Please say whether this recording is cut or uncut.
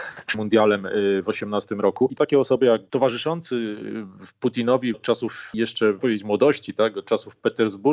cut